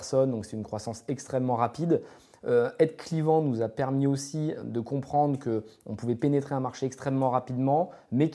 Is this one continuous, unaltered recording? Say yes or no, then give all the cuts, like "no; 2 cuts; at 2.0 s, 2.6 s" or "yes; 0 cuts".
yes; 0 cuts